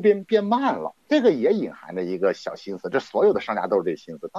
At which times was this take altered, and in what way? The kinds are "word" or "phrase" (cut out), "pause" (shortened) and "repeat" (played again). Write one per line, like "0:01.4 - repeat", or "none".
0:01.0 - pause